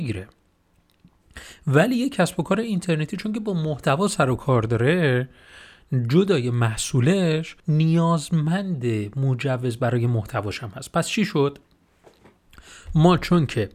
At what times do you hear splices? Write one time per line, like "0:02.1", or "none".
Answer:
0:07.6